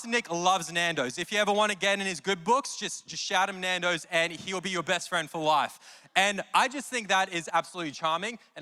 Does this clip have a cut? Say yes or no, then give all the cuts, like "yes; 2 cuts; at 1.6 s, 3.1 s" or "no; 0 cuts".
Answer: no; 0 cuts